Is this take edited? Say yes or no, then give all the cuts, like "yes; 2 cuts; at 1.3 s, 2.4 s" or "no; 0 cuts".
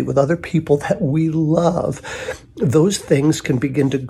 no; 0 cuts